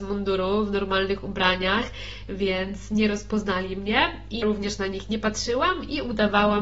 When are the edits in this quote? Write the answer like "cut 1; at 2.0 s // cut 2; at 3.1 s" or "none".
cut 1; at 4.4 s

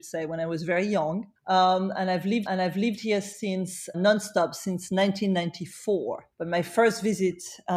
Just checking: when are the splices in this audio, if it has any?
cut 1; at 1.4 s // cut 2; at 2.5 s // cut 3; at 3.9 s // cut 4; at 6.3 s

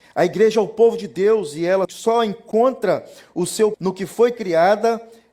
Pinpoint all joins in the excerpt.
cut 1; at 1.8 s // cut 2; at 3.7 s

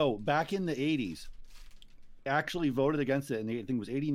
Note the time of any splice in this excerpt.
cut 1; at 2.3 s

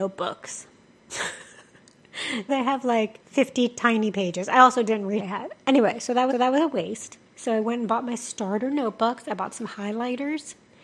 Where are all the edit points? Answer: cut 1; at 2.5 s // cut 2; at 3.2 s // cut 3; at 5.2 s // cut 4; at 6.3 s // cut 5; at 7.3 s

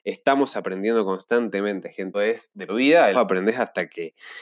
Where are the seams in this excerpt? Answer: cut 1; at 2.1 s // cut 2; at 2.7 s // cut 3; at 3.1 s

